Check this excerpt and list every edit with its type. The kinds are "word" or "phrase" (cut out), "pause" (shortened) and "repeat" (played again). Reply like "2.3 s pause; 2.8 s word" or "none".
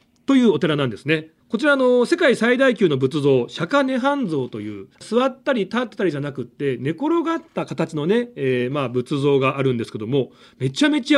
1.4 s pause; 4.9 s pause